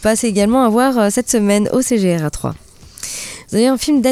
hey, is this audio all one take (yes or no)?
yes